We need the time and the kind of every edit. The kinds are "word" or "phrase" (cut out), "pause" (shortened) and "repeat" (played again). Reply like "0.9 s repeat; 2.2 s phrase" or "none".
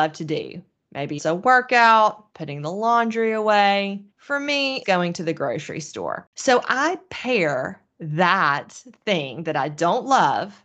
1.2 s word; 2.3 s pause; 4.1 s pause; 4.8 s word